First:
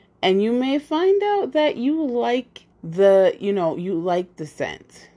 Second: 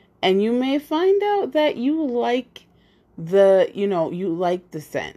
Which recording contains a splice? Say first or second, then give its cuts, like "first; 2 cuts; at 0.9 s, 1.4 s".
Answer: first; 1 cut; at 2.7 s